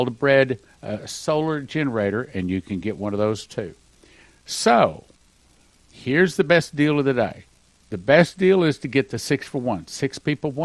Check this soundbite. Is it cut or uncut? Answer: uncut